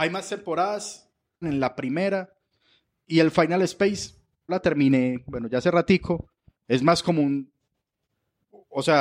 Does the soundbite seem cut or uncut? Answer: cut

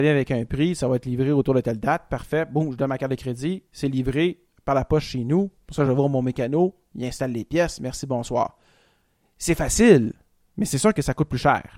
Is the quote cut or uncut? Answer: uncut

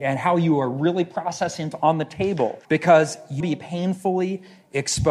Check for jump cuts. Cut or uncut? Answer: cut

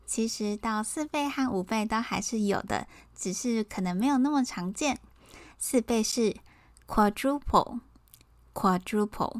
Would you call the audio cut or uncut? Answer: uncut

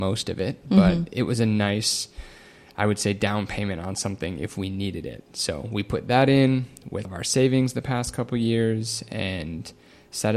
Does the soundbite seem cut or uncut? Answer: cut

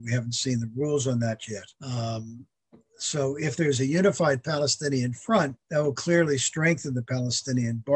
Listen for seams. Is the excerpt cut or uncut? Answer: cut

